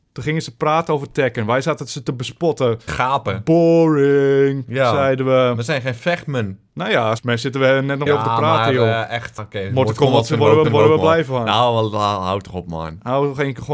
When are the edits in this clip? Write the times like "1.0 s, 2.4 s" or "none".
2.9 s, 6.7 s, 7.2 s, 8.1 s, 9.4 s, 10.6 s